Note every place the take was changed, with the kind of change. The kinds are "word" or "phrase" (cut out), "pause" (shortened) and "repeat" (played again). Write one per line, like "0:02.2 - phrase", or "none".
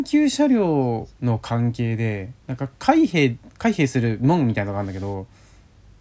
0:02.4 - pause